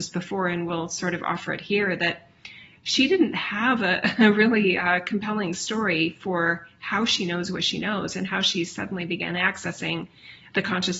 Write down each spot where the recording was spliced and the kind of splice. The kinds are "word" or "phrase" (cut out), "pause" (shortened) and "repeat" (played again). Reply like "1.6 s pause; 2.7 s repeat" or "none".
none